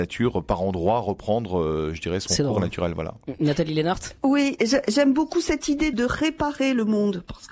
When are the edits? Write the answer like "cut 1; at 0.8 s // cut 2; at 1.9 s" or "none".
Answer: cut 1; at 4.2 s // cut 2; at 5.9 s